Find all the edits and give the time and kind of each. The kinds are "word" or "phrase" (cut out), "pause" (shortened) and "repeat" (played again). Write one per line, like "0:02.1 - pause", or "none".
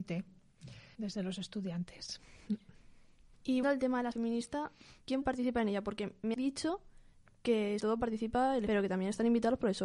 0:00.9 - word
0:03.6 - word
0:04.1 - word
0:05.2 - word
0:06.3 - word
0:07.8 - word
0:08.7 - word